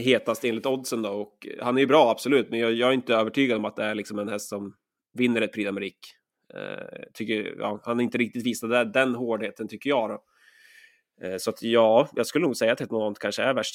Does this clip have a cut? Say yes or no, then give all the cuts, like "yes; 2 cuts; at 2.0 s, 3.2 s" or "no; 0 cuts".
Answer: no; 0 cuts